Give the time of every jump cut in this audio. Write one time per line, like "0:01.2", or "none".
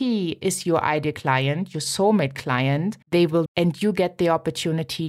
0:03.0
0:03.5